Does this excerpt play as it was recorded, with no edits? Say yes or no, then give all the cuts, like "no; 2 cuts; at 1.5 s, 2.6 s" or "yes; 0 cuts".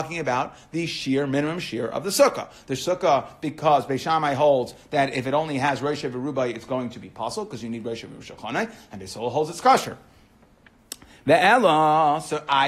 yes; 0 cuts